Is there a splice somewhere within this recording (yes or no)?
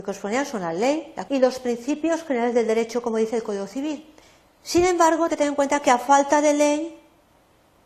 yes